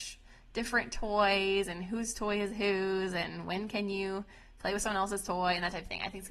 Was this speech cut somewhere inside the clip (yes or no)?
no